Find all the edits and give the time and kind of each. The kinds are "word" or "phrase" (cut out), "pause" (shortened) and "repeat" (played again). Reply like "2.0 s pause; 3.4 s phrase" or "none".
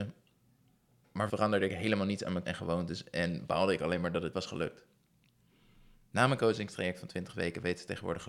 1.3 s word; 2.4 s word; 4.3 s word